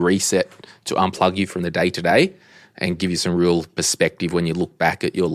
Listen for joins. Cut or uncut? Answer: uncut